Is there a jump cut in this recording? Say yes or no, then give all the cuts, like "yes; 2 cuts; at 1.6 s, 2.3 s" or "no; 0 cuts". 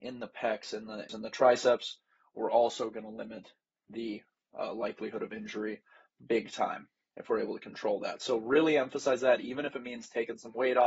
yes; 1 cut; at 1.1 s